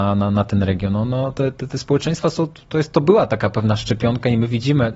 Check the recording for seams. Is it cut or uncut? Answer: uncut